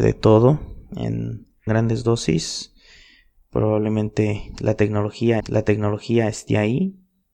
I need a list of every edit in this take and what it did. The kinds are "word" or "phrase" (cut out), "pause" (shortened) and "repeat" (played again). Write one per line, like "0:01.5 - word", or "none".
0:01.7 - phrase
0:05.4 - repeat